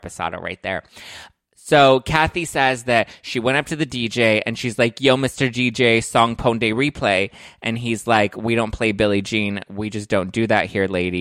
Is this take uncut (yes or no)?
yes